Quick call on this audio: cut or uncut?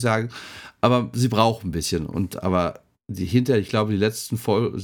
uncut